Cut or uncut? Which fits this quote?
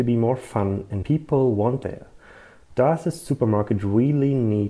cut